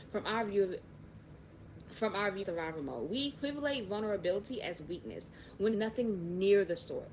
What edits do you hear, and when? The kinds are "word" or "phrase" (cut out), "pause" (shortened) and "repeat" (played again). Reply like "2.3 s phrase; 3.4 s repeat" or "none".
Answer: 2.4 s word; 5.7 s word